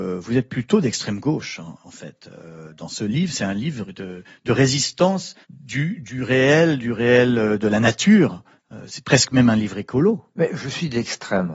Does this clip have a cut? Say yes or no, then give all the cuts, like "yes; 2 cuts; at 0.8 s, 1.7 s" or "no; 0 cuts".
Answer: yes; 1 cut; at 5.4 s